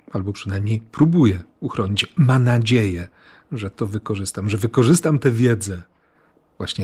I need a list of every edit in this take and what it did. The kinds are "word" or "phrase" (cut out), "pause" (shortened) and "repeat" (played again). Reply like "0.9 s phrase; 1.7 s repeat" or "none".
none